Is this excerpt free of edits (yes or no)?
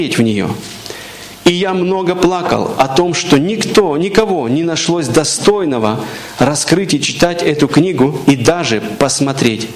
yes